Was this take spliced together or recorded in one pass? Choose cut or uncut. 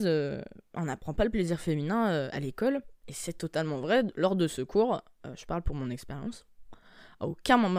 uncut